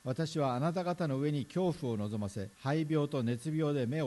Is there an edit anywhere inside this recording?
yes; 1 cut; at 2.5 s

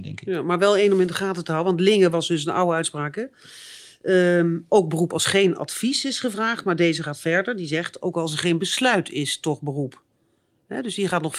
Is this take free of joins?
yes; 0 cuts

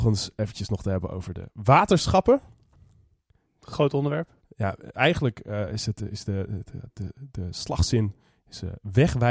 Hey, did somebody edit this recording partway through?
no; 0 cuts

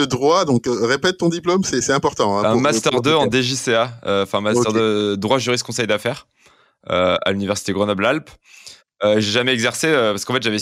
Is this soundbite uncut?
yes; 0 cuts

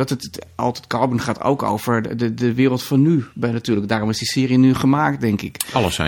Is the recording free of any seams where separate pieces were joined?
yes; 0 cuts

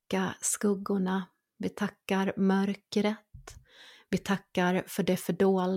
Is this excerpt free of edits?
yes; 0 cuts

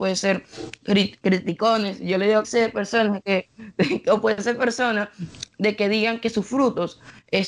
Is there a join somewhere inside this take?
yes; 2 cuts; at 1.2 s, 2.4 s

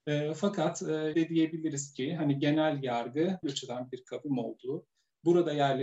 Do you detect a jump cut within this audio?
yes; 2 cuts; at 1.1 s, 3.4 s

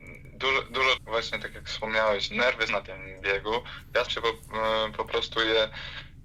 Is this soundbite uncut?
no; 4 cuts; at 1.0 s, 2.3 s, 2.7 s, 4.1 s

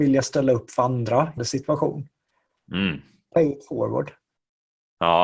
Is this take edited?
yes; 1 cut; at 1.4 s

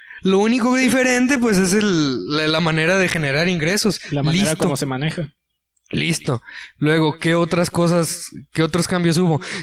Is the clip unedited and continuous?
yes; 0 cuts

